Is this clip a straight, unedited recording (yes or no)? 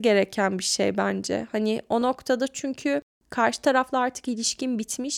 yes